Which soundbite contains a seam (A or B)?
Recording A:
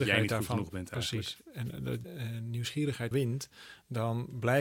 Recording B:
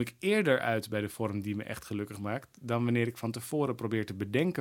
A